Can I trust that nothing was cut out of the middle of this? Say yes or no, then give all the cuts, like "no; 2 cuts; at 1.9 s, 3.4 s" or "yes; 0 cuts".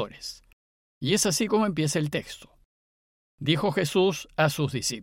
yes; 0 cuts